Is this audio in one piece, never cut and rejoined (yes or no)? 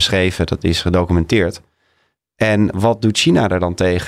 yes